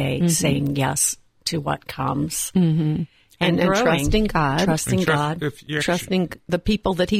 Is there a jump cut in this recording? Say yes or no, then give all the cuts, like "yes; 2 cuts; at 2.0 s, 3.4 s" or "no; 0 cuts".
no; 0 cuts